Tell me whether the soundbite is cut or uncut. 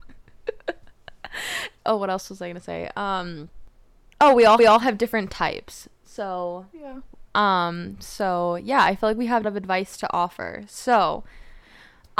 cut